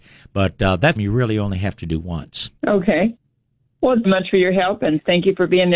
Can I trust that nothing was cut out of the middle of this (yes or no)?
no